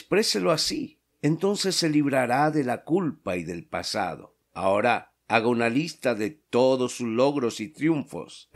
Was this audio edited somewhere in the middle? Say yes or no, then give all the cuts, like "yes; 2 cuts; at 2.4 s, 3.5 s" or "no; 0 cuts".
yes; 2 cuts; at 1.1 s, 4.4 s